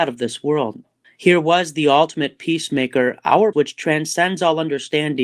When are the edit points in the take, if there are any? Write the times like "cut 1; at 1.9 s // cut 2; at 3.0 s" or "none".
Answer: cut 1; at 1.0 s // cut 2; at 3.5 s